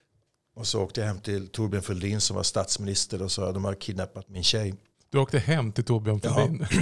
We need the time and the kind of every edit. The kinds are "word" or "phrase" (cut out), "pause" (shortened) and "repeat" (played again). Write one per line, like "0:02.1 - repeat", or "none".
0:04.9 - pause